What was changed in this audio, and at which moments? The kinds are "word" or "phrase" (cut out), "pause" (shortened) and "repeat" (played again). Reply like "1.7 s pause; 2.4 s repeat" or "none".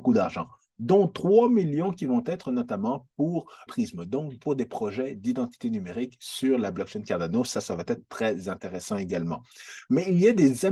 3.7 s word